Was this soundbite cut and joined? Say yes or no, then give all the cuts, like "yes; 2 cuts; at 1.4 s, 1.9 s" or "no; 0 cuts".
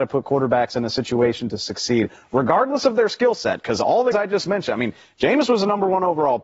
yes; 1 cut; at 4.1 s